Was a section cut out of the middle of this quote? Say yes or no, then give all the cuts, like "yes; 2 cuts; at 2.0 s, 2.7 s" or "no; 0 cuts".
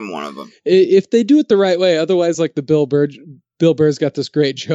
no; 0 cuts